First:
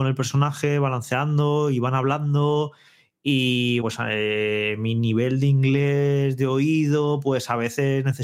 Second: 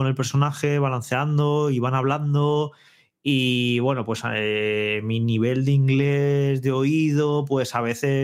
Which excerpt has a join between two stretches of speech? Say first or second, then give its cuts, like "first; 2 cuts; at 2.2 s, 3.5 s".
first; 1 cut; at 3.8 s